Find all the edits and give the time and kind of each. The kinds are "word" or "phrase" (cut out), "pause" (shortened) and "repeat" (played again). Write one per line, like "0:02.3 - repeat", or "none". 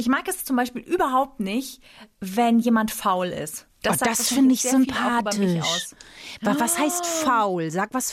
none